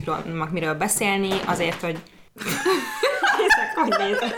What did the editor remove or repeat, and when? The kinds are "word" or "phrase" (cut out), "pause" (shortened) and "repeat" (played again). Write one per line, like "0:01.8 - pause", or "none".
0:01.8 - word